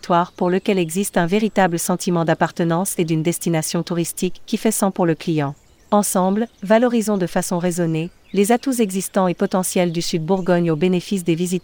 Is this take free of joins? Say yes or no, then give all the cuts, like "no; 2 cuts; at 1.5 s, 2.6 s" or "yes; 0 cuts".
yes; 0 cuts